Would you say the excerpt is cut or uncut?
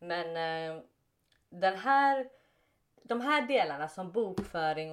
uncut